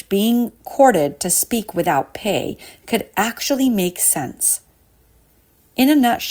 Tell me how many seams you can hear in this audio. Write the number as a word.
zero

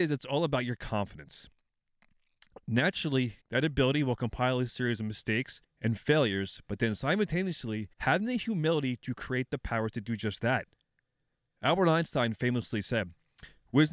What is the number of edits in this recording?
three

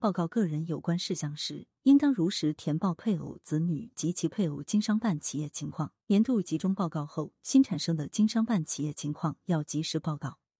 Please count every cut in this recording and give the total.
one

